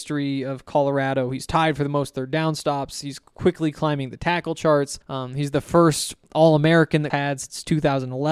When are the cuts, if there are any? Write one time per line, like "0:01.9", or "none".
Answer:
0:05.0
0:07.1